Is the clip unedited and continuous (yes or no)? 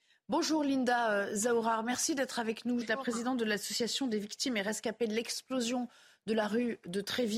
no